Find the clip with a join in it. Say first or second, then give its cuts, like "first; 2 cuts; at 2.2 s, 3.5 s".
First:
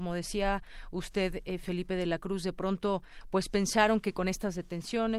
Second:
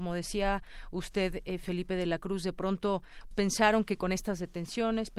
second; 1 cut; at 3.3 s